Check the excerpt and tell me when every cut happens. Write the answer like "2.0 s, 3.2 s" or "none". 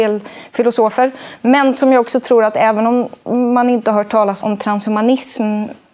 4.4 s